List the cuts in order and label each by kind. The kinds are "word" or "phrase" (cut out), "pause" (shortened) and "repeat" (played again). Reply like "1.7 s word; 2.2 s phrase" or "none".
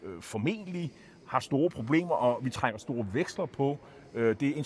none